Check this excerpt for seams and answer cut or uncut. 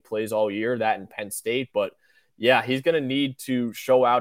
uncut